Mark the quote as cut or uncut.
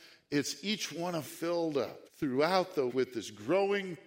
cut